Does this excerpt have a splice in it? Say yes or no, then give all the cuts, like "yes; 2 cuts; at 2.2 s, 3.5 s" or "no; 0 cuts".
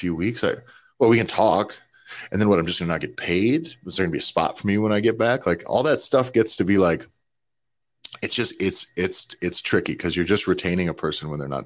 no; 0 cuts